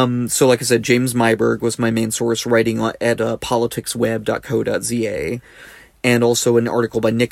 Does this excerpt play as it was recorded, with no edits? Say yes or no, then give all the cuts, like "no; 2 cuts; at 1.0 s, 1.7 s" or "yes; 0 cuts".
yes; 0 cuts